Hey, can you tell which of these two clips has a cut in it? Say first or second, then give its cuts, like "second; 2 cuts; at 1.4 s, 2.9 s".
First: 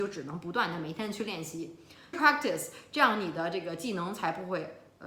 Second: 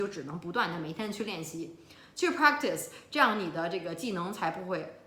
first; 1 cut; at 2.1 s